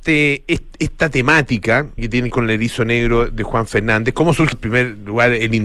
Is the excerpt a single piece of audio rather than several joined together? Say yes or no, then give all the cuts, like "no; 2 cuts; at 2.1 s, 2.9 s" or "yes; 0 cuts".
no; 3 cuts; at 2.0 s, 2.3 s, 4.5 s